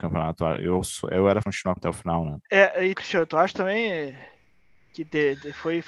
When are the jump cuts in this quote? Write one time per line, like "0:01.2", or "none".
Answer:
0:01.4
0:01.8
0:02.4
0:02.9